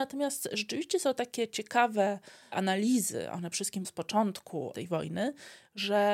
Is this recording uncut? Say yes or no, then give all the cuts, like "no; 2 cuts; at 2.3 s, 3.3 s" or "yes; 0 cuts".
no; 2 cuts; at 3.5 s, 3.8 s